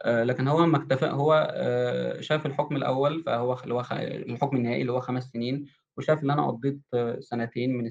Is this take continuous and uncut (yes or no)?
yes